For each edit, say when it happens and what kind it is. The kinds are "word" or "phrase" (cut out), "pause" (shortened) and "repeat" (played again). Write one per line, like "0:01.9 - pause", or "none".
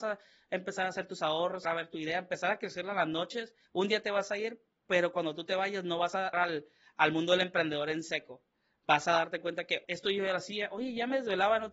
0:01.6 - word
0:03.6 - pause
0:06.3 - phrase
0:09.8 - word